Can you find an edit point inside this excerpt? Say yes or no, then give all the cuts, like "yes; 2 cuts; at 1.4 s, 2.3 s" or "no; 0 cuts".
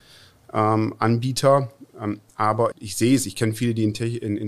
yes; 1 cut; at 2.7 s